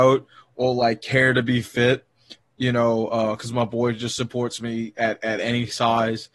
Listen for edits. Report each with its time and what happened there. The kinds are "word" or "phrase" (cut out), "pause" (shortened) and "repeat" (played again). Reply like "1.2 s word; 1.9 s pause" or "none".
none